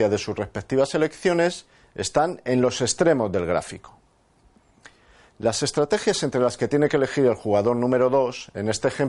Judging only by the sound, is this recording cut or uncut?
uncut